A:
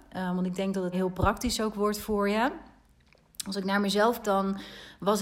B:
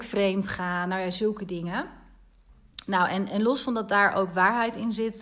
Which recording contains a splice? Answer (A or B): A